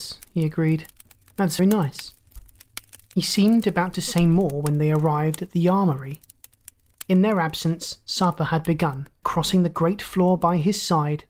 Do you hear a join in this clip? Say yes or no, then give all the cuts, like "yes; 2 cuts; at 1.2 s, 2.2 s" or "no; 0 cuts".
yes; 2 cuts; at 1.6 s, 9.2 s